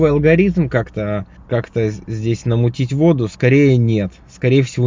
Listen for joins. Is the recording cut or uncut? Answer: uncut